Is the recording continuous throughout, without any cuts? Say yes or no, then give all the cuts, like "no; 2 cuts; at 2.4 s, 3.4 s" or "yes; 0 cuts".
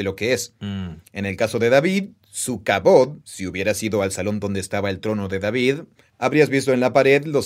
no; 1 cut; at 3.2 s